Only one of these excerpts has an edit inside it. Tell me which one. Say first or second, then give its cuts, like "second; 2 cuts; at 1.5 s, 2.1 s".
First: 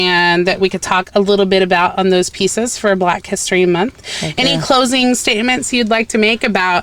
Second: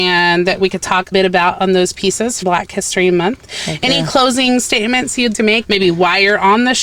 second; 4 cuts; at 1.1 s, 2.4 s, 5.3 s, 5.6 s